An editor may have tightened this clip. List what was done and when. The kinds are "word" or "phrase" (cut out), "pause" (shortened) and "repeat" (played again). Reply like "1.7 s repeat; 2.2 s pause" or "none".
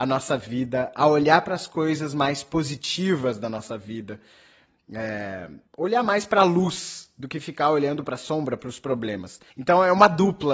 5.7 s pause; 9.5 s pause